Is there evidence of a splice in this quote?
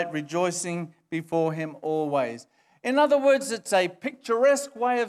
no; 0 cuts

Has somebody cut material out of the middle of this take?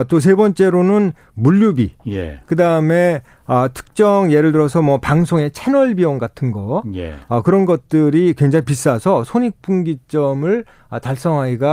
yes; 1 cut; at 2.0 s

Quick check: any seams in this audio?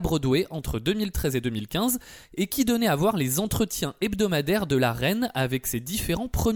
no; 0 cuts

